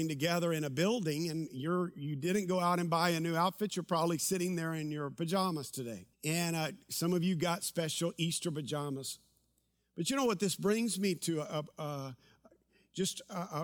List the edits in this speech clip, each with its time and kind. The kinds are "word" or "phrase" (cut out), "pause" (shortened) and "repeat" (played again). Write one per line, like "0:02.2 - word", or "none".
0:06.1 - pause